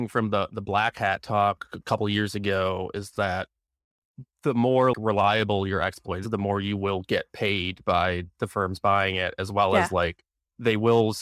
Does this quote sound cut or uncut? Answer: cut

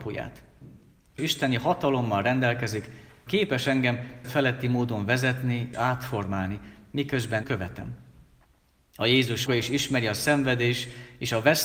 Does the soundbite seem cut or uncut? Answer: cut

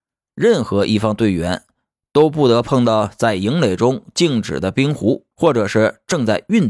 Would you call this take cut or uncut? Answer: cut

